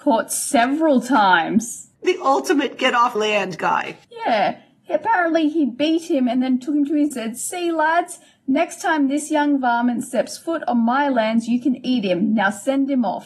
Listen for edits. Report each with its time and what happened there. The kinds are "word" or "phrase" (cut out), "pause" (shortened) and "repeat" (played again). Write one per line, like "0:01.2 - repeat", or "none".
0:01.9 - pause
0:03.1 - word
0:04.0 - pause
0:07.1 - phrase

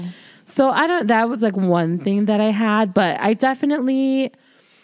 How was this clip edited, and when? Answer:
none

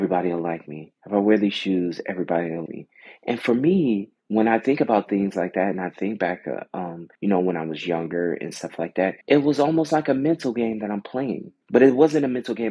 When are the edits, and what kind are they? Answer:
0:01.0 - pause
0:02.7 - word
0:04.2 - pause
0:07.1 - pause
0:09.2 - pause
0:11.6 - pause

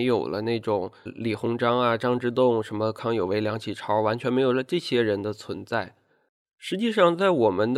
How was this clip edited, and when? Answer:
0:01.1 - word

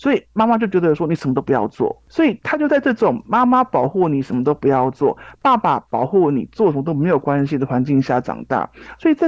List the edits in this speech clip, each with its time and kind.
0:05.4 - pause

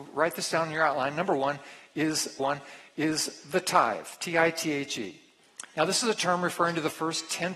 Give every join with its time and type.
0:02.4 - repeat

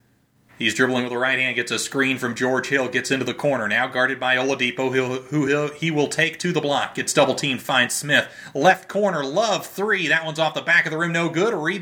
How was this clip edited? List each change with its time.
none

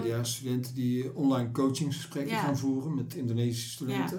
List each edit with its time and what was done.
none

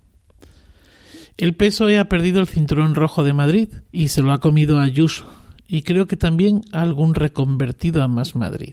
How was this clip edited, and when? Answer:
0:03.8 - pause

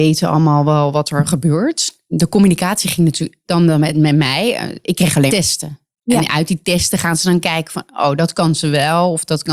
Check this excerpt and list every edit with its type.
0:03.4 - phrase
0:05.3 - word

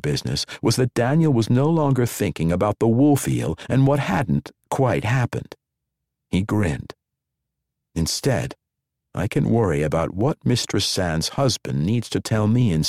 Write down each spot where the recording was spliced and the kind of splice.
none

